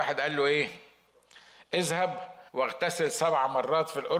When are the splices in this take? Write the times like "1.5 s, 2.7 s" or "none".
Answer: 2.5 s